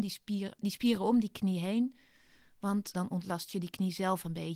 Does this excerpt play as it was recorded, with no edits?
no; 1 cut; at 2.9 s

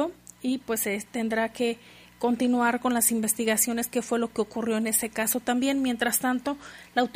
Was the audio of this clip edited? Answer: no; 0 cuts

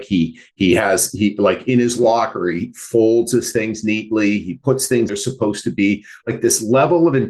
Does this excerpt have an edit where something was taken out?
yes; 1 cut; at 5.1 s

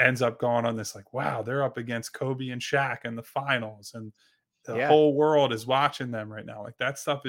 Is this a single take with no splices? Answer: yes; 0 cuts

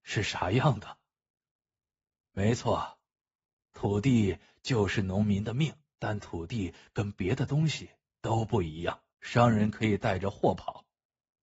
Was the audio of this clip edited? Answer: yes; 2 cuts; at 5.9 s, 9.1 s

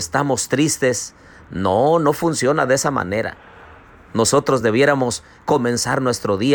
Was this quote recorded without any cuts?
yes; 0 cuts

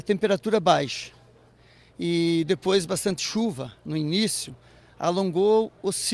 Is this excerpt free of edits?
yes; 0 cuts

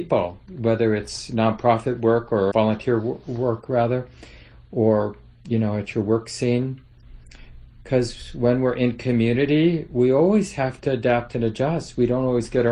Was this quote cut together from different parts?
yes; 1 cut; at 2.5 s

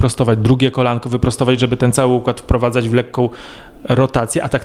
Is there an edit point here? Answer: no; 0 cuts

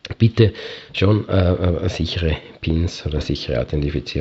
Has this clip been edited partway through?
no; 0 cuts

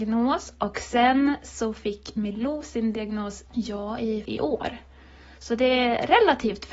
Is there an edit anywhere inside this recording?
yes; 2 cuts; at 3.5 s, 4.2 s

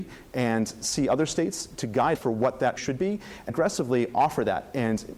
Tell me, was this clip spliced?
yes; 3 cuts; at 2.1 s, 2.8 s, 3.5 s

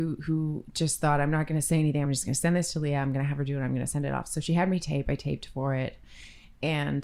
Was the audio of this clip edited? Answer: no; 0 cuts

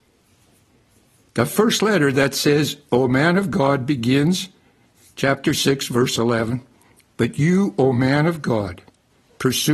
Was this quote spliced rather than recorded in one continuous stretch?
no; 0 cuts

